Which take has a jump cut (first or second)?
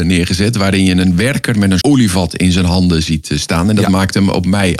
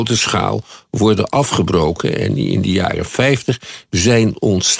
first